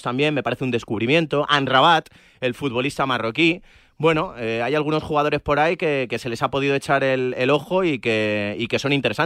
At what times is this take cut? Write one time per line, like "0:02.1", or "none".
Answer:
none

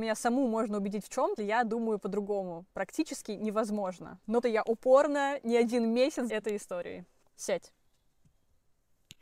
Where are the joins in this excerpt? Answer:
0:01.4
0:04.4
0:06.3

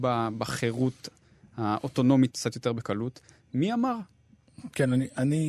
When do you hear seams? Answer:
0:02.3

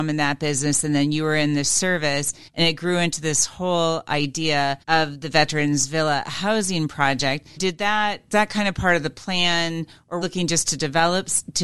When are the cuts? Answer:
0:02.5
0:04.8
0:07.6
0:08.3
0:10.2

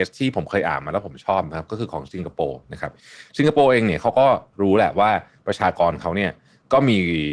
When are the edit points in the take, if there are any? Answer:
none

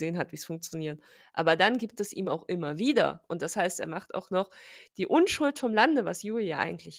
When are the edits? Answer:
none

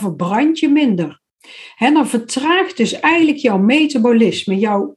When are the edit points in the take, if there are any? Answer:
none

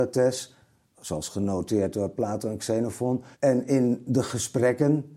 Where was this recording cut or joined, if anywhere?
0:03.3

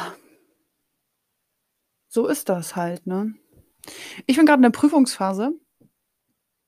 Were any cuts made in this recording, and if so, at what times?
none

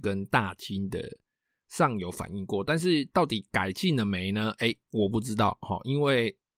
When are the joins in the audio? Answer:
none

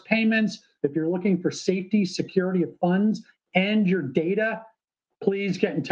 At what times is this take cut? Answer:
none

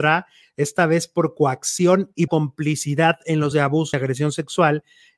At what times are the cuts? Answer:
0:02.3
0:03.5
0:03.9

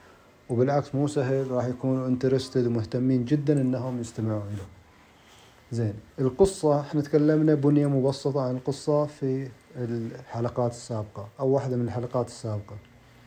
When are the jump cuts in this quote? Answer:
0:06.1

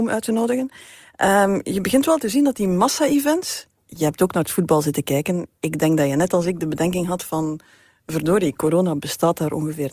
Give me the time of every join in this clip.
none

